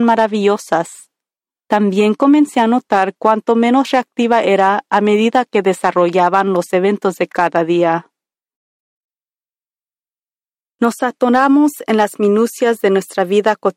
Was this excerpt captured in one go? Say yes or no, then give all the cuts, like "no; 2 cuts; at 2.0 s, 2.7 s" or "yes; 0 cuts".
yes; 0 cuts